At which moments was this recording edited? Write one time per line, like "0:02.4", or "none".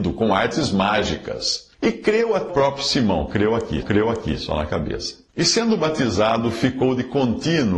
0:01.7
0:02.5
0:03.8
0:05.3